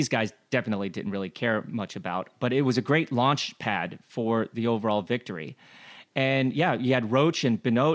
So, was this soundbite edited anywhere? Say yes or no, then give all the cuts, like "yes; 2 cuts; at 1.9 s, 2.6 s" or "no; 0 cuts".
no; 0 cuts